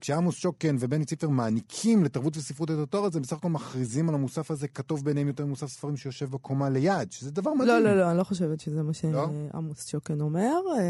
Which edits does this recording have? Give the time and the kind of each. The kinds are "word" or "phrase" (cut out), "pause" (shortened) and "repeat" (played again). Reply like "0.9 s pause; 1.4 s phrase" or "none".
none